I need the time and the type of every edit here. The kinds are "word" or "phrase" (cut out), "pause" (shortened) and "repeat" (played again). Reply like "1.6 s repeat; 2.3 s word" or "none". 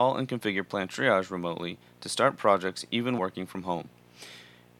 3.2 s word